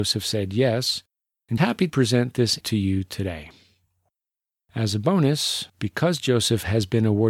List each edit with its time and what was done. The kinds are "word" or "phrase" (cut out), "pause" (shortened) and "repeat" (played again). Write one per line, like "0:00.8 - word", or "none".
0:01.6 - word
0:01.9 - word
0:02.6 - word
0:05.7 - pause